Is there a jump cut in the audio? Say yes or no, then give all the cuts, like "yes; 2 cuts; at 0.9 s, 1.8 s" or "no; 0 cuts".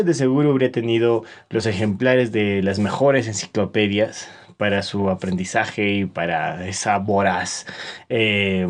no; 0 cuts